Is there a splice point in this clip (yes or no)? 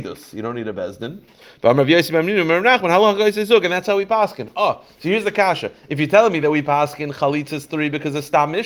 no